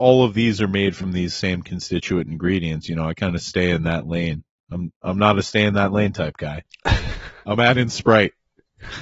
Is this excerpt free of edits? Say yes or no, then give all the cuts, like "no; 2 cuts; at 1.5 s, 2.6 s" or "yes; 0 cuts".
yes; 0 cuts